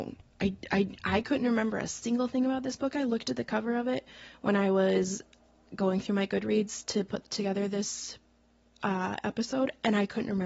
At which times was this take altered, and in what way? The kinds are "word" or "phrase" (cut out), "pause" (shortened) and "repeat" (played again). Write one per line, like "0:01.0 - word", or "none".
none

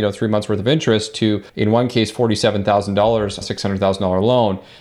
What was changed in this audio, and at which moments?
0:01.5 - pause
0:03.4 - phrase

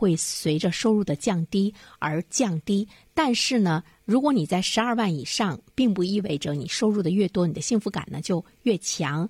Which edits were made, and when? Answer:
none

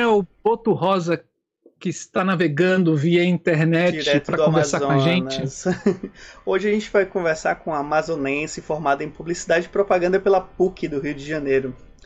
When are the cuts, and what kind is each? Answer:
none

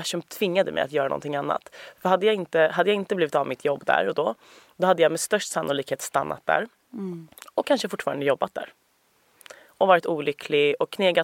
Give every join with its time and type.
none

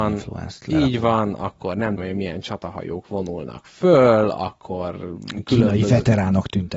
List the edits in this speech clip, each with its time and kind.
0:02.0 - word

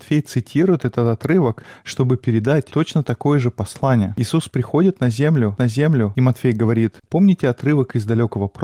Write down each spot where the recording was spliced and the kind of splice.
0:05.6 - repeat

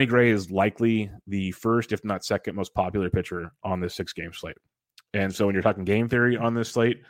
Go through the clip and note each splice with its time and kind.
none

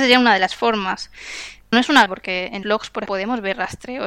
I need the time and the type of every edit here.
0:01.7 - word
0:02.1 - word
0:02.6 - word
0:03.1 - word

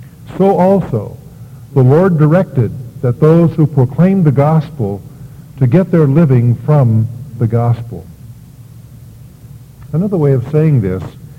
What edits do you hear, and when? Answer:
none

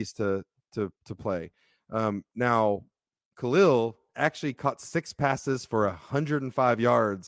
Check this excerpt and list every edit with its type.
0:01.0 - pause
0:03.2 - pause

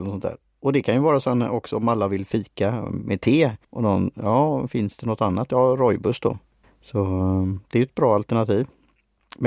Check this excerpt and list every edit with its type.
0:03.6 - pause
0:06.6 - pause

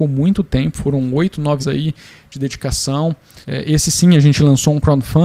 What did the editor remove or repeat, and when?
0:01.6 - word
0:03.4 - pause

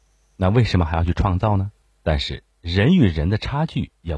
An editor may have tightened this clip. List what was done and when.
0:01.8 - pause

